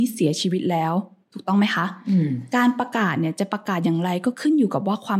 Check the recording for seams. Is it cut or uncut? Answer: uncut